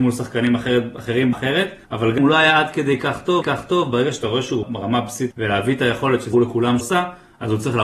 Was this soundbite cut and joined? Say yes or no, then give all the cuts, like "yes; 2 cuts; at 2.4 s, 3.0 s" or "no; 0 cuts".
yes; 8 cuts; at 1.3 s, 1.8 s, 2.2 s, 3.4 s, 4.6 s, 5.3 s, 6.3 s, 6.8 s